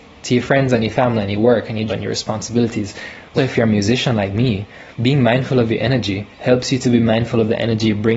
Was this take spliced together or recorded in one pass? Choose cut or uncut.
cut